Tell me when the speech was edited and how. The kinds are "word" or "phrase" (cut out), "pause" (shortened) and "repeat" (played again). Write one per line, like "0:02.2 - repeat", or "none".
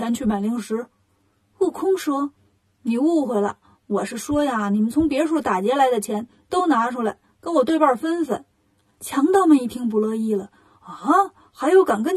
none